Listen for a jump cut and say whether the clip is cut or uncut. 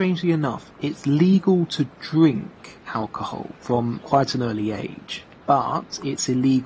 uncut